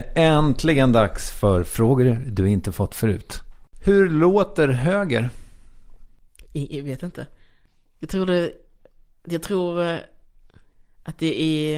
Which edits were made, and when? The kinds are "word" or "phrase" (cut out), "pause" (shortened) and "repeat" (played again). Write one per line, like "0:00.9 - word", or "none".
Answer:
none